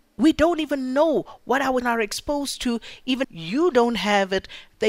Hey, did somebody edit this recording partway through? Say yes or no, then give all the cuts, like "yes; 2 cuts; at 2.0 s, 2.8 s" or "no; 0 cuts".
yes; 2 cuts; at 1.8 s, 3.2 s